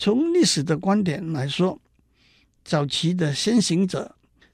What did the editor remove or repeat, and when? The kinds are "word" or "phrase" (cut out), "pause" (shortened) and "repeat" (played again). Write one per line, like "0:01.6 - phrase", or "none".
none